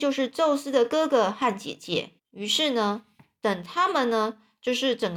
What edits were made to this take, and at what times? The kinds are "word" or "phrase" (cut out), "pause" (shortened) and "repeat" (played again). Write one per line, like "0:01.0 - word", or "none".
0:02.2 - pause